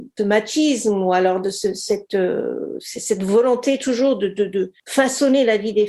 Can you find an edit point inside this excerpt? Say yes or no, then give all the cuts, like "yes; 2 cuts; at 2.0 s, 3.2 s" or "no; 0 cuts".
no; 0 cuts